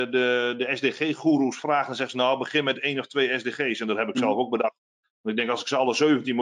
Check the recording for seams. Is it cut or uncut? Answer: uncut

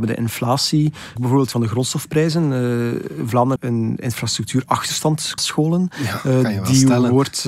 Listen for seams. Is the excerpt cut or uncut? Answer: cut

